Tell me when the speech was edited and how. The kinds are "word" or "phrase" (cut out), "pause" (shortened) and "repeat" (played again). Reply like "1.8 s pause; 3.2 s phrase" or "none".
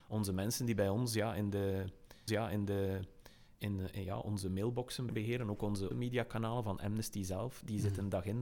2.3 s repeat; 5.1 s word; 5.9 s phrase